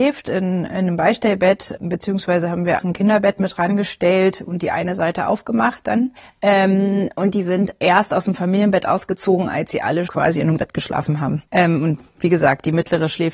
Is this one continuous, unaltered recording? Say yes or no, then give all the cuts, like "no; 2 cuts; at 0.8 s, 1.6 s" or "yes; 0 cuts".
no; 6 cuts; at 1.8 s, 2.8 s, 6.2 s, 10.1 s, 10.6 s, 11.5 s